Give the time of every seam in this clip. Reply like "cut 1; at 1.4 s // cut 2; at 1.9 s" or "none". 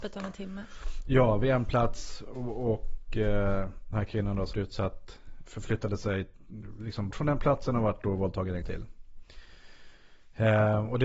cut 1; at 3.9 s // cut 2; at 4.5 s // cut 3; at 5.5 s // cut 4; at 7.1 s // cut 5; at 8.6 s